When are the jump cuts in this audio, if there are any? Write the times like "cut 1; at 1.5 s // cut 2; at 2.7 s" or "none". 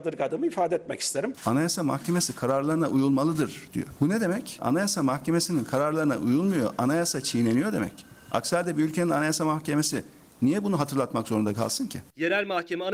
none